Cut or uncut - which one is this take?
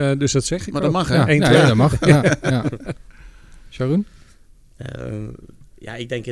uncut